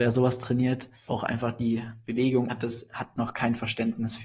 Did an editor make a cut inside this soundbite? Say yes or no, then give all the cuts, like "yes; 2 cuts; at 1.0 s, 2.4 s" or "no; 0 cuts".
yes; 2 cuts; at 1.1 s, 2.5 s